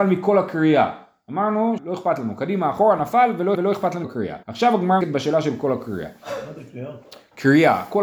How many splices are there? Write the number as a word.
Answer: five